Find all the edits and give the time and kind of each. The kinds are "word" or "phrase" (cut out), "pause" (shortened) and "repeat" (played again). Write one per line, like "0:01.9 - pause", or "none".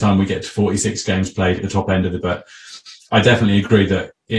0:01.6 - word
0:02.2 - word